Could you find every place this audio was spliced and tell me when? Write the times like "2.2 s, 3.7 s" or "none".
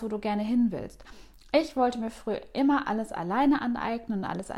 none